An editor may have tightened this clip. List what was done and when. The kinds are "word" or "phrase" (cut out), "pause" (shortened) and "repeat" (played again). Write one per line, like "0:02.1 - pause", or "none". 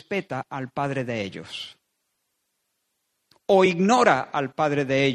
none